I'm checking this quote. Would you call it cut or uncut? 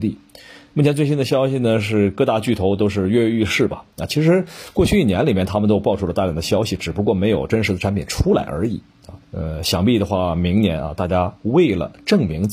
cut